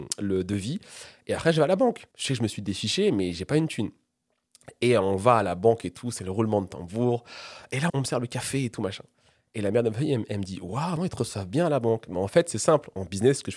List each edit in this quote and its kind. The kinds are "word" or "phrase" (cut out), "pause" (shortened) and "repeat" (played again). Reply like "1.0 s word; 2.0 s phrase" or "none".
2.1 s pause; 7.9 s word; 11.0 s word